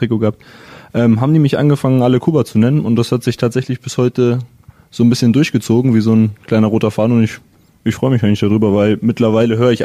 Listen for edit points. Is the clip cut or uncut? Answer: uncut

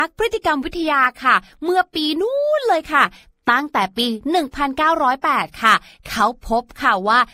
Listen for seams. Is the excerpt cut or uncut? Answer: uncut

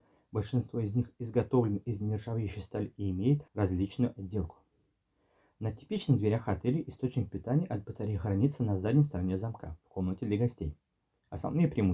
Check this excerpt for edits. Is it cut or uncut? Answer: cut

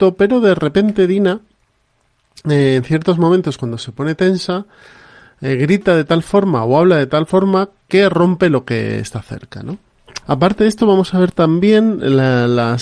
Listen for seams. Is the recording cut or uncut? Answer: cut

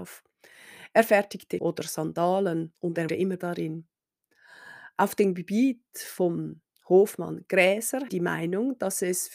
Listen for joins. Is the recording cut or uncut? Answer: cut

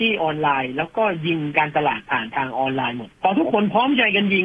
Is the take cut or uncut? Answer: cut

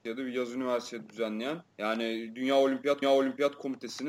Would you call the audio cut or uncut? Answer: cut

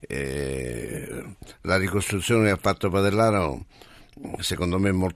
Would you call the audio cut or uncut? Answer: uncut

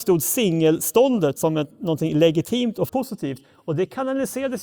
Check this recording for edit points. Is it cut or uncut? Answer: cut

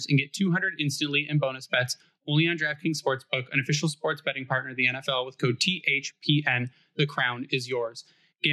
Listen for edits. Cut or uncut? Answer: uncut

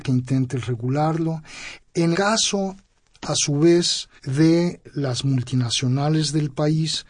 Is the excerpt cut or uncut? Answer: cut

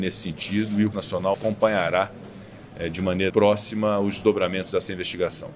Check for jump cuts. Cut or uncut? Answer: cut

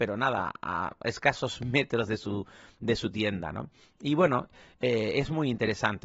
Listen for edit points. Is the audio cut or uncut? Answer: uncut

